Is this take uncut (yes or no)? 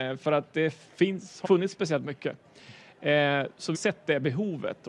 no